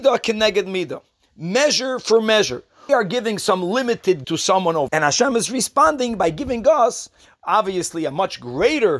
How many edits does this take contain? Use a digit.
3